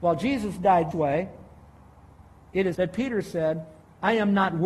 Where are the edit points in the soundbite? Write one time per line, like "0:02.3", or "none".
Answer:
0:00.9
0:02.7